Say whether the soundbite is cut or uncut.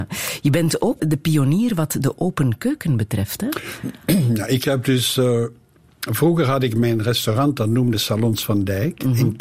cut